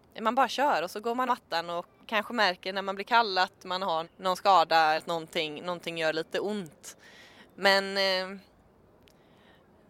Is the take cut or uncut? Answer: cut